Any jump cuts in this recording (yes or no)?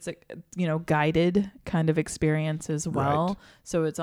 no